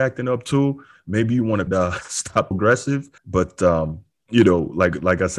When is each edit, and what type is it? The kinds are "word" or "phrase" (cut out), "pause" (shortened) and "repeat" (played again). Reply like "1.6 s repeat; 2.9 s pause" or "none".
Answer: 1.7 s phrase; 2.5 s phrase; 3.2 s pause